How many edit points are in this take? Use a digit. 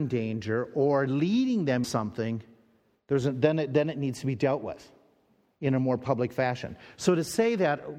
1